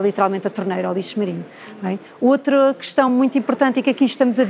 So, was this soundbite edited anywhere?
no; 0 cuts

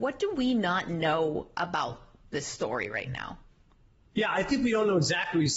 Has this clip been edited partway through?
no; 0 cuts

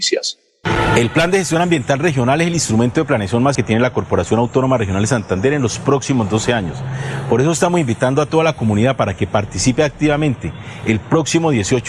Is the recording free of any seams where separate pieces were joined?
no; 1 cut; at 3.5 s

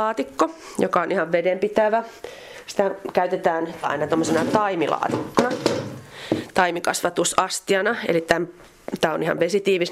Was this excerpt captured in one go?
no; 1 cut; at 3.8 s

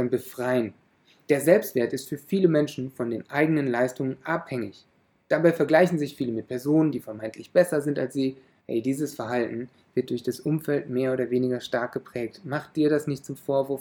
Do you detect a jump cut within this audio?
no; 0 cuts

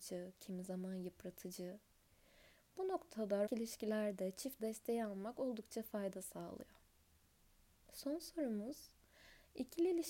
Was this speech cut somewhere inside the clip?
yes; 2 cuts; at 3.5 s, 4.6 s

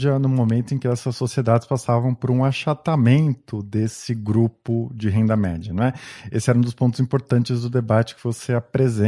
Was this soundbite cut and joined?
no; 0 cuts

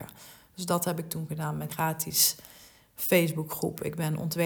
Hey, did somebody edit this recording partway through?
yes; 1 cut; at 1.7 s

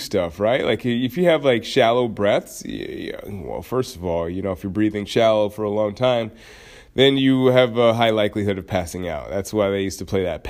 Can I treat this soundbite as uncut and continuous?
yes; 0 cuts

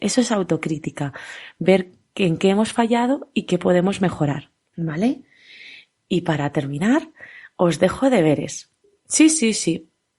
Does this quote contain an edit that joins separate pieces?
no; 0 cuts

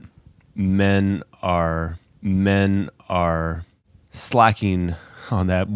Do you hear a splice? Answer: yes; 1 cut; at 2.1 s

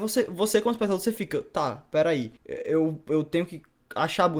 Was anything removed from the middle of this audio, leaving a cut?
yes; 1 cut; at 2.4 s

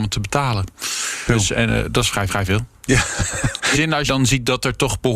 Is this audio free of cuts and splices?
no; 4 cuts; at 1.3 s, 2.3 s, 3.7 s, 4.1 s

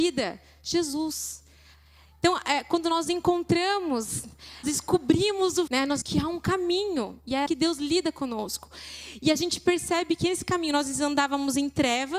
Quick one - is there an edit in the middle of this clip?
yes; 4 cuts; at 4.6 s, 5.7 s, 6.0 s, 7.5 s

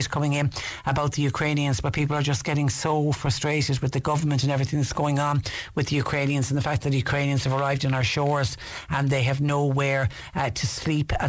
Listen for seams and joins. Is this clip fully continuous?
yes; 0 cuts

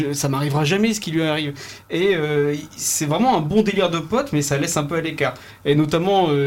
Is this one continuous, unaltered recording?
yes; 0 cuts

